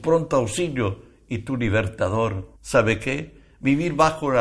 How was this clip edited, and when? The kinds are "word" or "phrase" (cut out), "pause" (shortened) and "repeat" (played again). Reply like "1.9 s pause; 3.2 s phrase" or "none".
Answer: 2.6 s pause